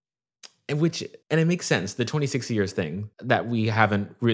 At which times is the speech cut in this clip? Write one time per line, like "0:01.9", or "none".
0:01.2
0:03.1